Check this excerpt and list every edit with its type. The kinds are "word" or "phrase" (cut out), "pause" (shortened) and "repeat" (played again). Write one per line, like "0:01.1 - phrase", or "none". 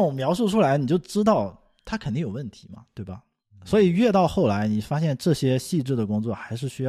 none